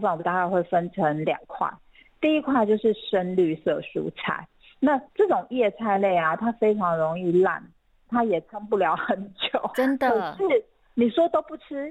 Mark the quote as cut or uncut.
cut